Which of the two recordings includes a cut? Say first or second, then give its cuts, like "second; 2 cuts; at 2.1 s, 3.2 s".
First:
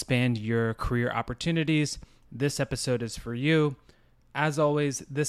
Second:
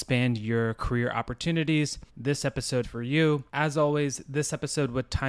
second; 3 cuts; at 2.1 s, 2.8 s, 3.5 s